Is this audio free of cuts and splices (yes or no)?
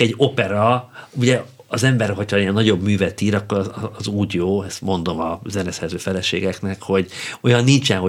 yes